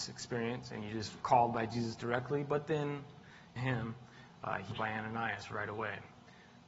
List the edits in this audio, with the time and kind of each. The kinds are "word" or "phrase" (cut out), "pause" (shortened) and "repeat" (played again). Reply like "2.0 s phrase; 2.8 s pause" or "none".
1.2 s word; 3.6 s word; 4.7 s phrase